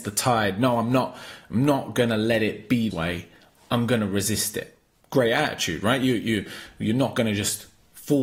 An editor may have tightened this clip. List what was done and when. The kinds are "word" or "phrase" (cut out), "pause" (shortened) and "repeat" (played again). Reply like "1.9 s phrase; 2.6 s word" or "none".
2.9 s word